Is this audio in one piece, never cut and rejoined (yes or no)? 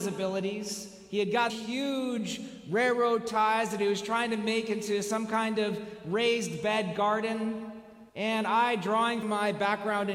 no